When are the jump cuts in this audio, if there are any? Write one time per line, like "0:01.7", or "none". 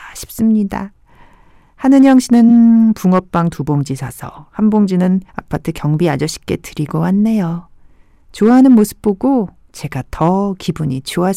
0:05.3